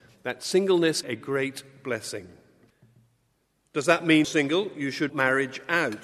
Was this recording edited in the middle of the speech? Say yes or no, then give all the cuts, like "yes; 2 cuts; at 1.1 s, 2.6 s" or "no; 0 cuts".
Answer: yes; 4 cuts; at 1.0 s, 2.7 s, 4.2 s, 5.1 s